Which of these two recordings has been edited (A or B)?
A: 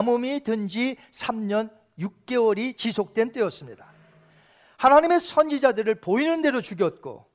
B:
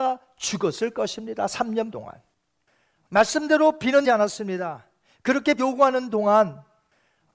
B